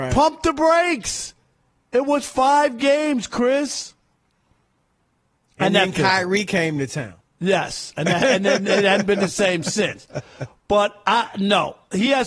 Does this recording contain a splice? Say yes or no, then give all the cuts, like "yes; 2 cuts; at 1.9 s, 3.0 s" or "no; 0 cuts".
no; 0 cuts